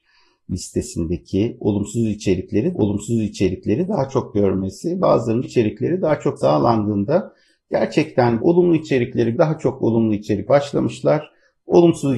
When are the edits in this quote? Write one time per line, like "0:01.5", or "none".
0:02.7
0:05.4
0:06.4
0:08.4
0:09.3
0:10.5